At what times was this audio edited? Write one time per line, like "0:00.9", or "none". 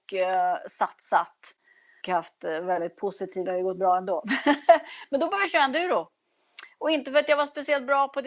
0:02.0
0:03.5

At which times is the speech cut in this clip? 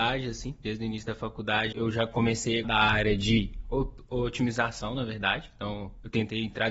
0:01.7
0:02.6

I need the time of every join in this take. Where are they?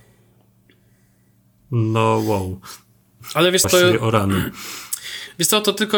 0:03.6

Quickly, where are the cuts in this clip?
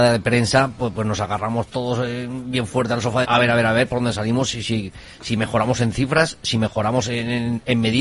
0:03.2

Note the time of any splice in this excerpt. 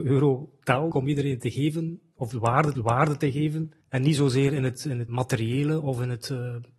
0:00.9
0:02.8
0:03.8
0:05.1

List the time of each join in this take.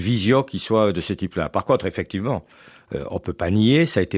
none

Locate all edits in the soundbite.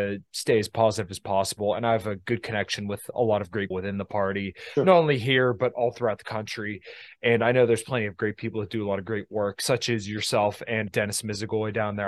0:03.7
0:10.9

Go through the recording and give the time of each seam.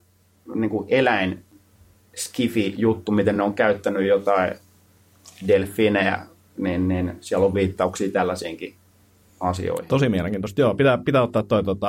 none

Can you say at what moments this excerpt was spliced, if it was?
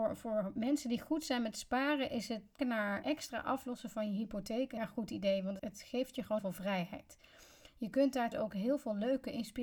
0:02.6
0:03.0
0:04.8
0:05.6
0:06.4
0:08.3

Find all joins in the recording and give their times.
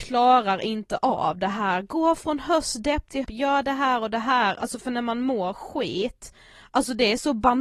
0:03.2

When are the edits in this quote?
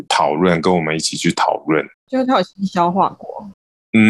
0:02.0

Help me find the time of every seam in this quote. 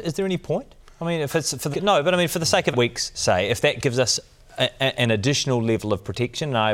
0:01.7
0:02.7

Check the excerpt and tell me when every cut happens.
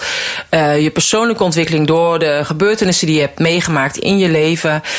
none

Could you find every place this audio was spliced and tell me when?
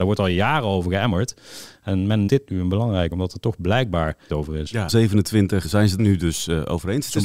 0:02.3
0:03.1
0:04.3
0:04.9
0:05.6
0:06.0

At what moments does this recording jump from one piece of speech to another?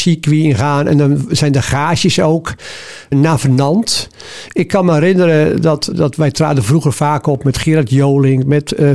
0:03.1
0:05.9

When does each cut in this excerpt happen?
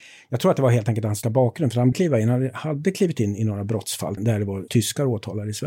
0:01.2
0:01.9
0:04.2
0:04.7

